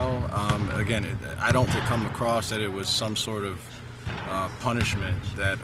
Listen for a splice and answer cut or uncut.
cut